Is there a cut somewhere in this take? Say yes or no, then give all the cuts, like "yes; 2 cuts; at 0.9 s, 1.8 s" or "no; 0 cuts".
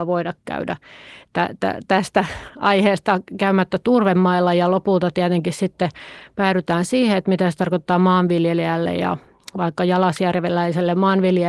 no; 0 cuts